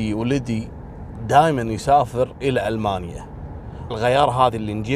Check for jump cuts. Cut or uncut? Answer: cut